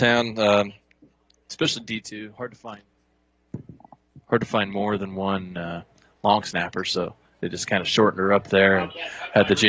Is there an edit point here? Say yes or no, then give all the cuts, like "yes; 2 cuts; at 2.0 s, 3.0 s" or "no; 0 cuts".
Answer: no; 0 cuts